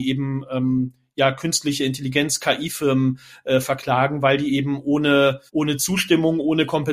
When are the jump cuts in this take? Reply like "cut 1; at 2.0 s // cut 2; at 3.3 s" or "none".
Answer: cut 1; at 5.5 s